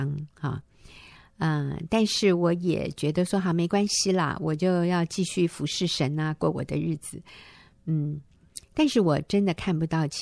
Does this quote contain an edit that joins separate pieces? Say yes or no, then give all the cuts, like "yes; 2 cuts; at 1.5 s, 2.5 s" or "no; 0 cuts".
no; 0 cuts